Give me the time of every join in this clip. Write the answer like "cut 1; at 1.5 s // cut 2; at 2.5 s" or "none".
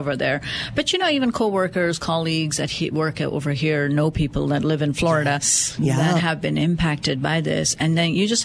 none